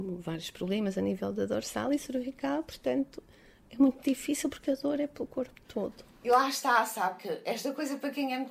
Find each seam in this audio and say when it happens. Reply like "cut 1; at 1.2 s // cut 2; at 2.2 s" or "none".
none